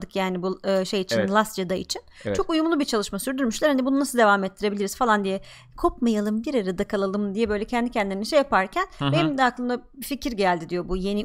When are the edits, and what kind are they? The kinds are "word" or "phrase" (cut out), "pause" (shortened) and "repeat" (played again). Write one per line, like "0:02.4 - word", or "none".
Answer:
none